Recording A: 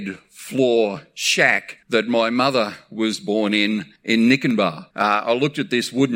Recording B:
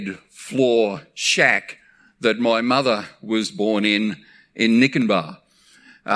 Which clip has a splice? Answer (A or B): A